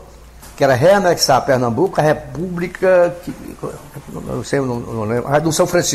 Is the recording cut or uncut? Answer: uncut